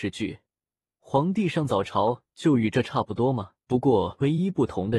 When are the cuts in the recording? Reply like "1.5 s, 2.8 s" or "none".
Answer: 3.6 s